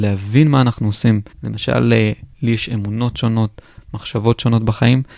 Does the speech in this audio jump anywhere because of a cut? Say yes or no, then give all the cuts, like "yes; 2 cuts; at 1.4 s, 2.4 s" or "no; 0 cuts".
yes; 1 cut; at 1.3 s